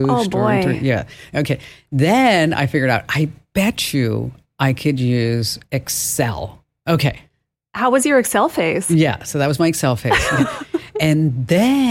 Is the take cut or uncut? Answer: uncut